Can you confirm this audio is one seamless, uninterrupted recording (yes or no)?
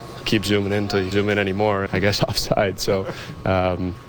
no